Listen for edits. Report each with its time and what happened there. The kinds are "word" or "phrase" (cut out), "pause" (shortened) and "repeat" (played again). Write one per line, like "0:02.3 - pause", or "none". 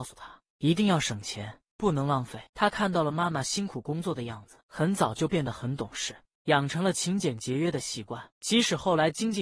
0:02.5 - pause
0:04.6 - pause
0:08.3 - pause